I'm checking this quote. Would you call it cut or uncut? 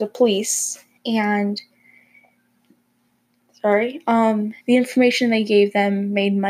cut